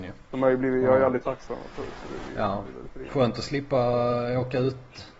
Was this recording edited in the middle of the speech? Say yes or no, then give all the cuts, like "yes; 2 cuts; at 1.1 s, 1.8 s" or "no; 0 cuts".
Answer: yes; 1 cut; at 1.2 s